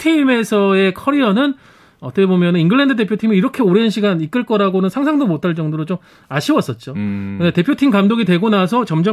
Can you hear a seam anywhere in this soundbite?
no; 0 cuts

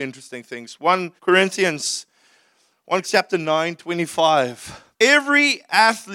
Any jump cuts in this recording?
yes; 3 cuts; at 1.2 s, 3.0 s, 4.9 s

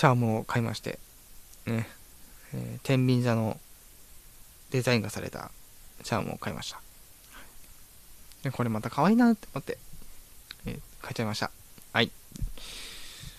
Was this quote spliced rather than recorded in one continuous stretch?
yes; 1 cut; at 4.5 s

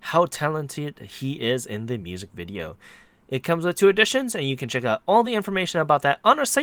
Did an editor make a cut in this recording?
no; 0 cuts

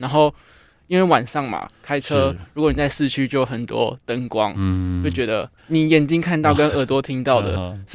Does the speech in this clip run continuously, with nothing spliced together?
no; 1 cut; at 5.6 s

